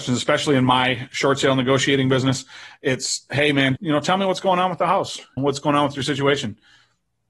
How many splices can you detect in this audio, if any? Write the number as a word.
two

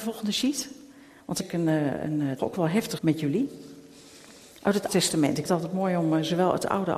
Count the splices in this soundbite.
five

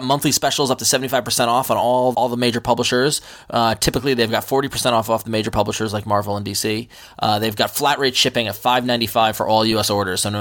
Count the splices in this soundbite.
one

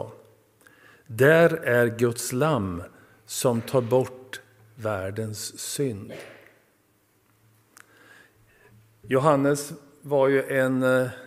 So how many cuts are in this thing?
zero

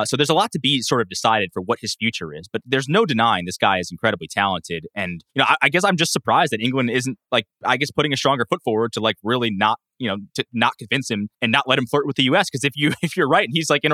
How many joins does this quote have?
three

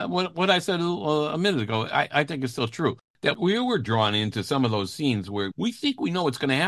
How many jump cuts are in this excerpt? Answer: one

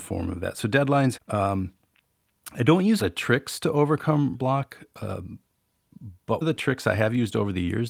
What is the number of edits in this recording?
four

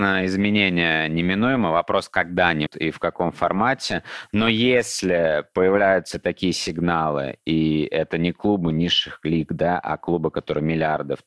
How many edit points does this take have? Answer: one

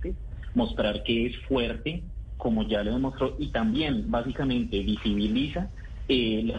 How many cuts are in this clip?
one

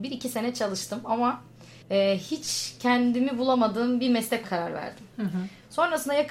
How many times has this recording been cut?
two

